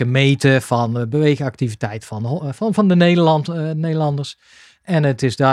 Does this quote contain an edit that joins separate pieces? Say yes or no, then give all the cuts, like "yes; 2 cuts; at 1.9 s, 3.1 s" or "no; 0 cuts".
no; 0 cuts